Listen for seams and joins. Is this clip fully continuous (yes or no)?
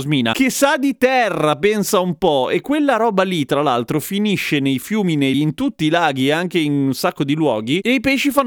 no